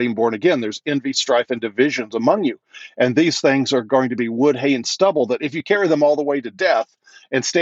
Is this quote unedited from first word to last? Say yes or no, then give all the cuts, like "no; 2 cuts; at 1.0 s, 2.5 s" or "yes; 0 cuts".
yes; 0 cuts